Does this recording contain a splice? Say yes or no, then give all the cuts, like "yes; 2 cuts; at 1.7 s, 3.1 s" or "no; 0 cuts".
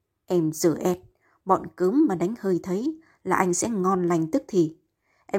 no; 0 cuts